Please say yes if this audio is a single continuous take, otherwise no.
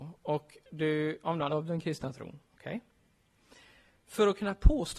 no